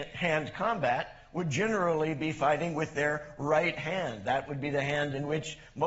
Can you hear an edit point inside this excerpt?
no; 0 cuts

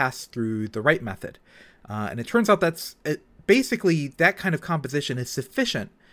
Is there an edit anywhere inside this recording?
no; 0 cuts

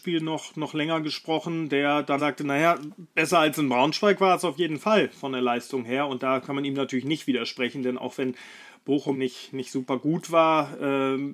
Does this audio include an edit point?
yes; 2 cuts; at 2.2 s, 9.1 s

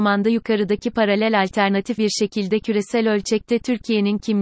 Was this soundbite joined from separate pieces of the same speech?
yes; 1 cut; at 2.0 s

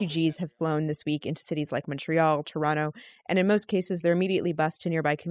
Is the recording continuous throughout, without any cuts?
yes; 0 cuts

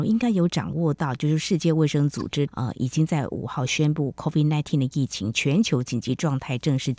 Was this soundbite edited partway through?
yes; 1 cut; at 2.5 s

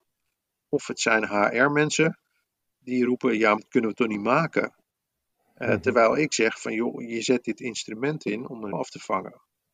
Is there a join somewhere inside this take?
yes; 2 cuts; at 3.6 s, 8.7 s

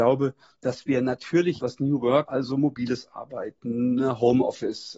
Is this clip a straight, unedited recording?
no; 2 cuts; at 1.6 s, 2.3 s

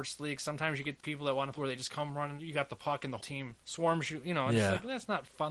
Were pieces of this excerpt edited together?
yes; 5 cuts; at 1.0 s, 1.6 s, 2.4 s, 3.2 s, 3.6 s

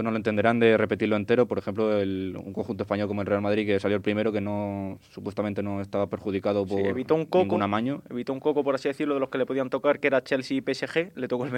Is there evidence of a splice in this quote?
no; 0 cuts

